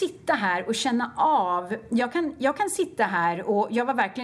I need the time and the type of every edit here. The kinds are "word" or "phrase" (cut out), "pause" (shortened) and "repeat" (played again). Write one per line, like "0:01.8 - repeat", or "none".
none